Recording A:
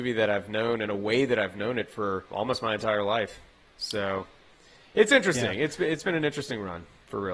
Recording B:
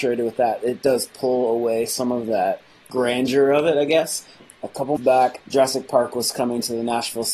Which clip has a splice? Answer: B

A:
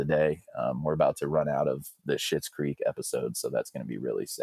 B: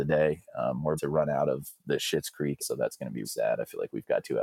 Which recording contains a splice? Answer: B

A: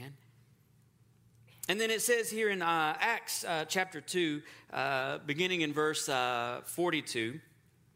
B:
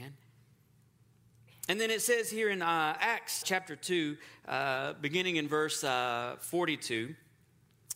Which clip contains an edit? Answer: B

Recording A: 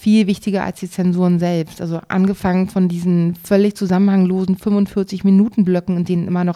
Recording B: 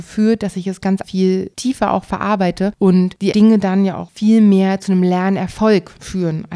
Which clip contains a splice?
B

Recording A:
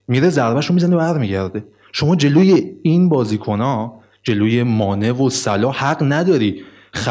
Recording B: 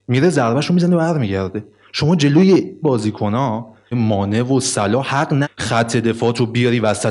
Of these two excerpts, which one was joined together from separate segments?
B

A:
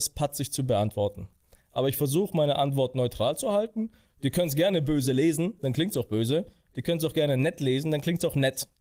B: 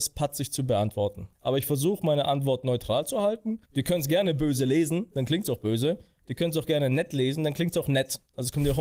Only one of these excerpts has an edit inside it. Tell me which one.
B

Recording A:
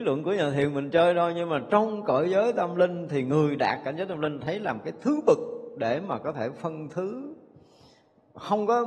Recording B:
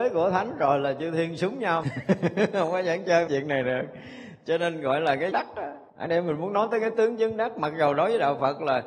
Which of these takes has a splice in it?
B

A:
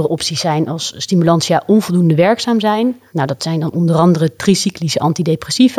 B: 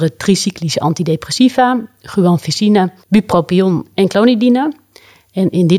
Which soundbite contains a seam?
B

